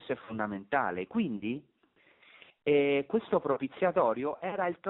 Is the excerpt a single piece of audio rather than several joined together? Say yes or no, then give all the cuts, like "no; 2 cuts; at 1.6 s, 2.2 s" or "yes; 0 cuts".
yes; 0 cuts